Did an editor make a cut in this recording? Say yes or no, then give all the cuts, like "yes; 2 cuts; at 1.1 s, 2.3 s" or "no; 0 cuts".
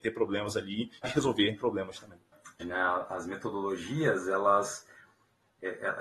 yes; 2 cuts; at 1.0 s, 2.6 s